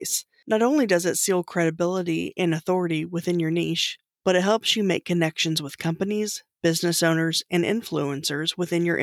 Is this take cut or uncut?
uncut